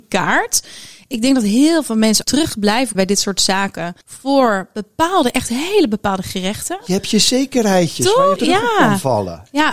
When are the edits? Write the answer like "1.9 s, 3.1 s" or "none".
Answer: 2.2 s, 2.9 s, 4.0 s, 8.4 s